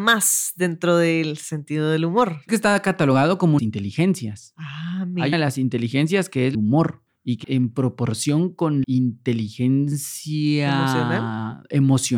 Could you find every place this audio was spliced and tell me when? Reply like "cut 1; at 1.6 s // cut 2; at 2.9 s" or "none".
cut 1; at 2.5 s // cut 2; at 3.6 s // cut 3; at 5.3 s // cut 4; at 6.5 s // cut 5; at 7.4 s // cut 6; at 8.8 s